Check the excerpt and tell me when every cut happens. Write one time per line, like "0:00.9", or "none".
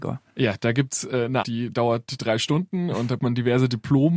0:01.4
0:03.2